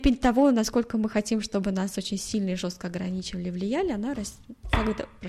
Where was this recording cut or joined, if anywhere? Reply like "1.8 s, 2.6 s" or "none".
none